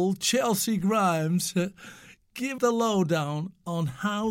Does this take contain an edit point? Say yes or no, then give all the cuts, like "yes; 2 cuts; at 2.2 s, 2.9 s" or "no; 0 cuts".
yes; 1 cut; at 2.6 s